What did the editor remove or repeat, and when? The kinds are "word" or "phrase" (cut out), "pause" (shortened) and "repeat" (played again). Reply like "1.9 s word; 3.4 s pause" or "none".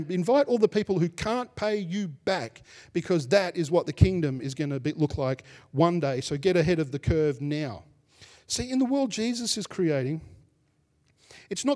none